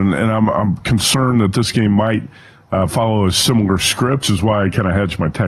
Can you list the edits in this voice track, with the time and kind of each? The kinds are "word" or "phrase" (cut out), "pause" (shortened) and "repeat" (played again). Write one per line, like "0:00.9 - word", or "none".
0:04.2 - word